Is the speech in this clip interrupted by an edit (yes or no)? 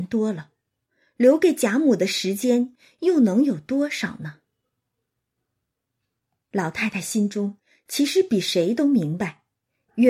no